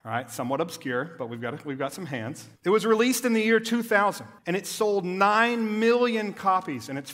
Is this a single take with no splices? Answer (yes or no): no